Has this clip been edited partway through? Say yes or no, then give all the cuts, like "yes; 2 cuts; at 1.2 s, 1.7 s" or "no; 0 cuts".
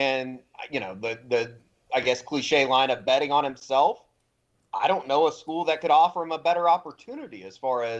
no; 0 cuts